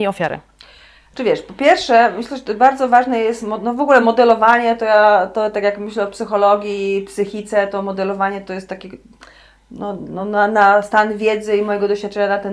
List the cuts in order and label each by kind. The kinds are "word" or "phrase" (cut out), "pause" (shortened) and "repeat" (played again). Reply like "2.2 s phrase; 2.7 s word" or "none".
none